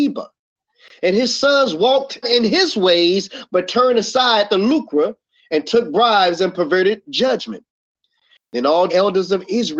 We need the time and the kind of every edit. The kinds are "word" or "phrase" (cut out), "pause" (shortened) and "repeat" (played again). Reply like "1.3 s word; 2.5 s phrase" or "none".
2.2 s word; 4.5 s word; 8.9 s word